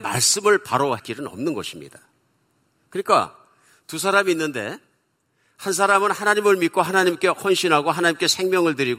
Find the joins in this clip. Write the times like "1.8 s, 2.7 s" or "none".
1.0 s